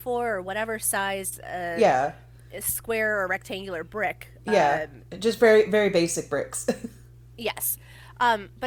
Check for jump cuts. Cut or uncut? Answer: uncut